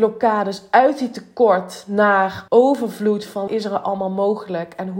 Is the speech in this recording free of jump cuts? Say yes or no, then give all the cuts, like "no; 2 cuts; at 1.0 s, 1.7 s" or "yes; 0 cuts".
no; 2 cuts; at 2.5 s, 3.5 s